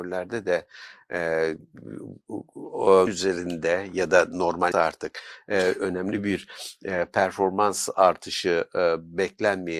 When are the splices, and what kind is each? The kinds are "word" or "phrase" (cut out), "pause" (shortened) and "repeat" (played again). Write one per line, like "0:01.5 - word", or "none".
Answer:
0:03.1 - word
0:04.7 - word